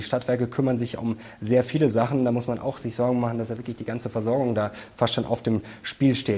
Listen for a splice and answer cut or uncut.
uncut